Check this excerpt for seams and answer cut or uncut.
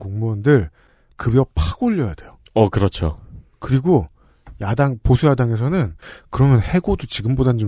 cut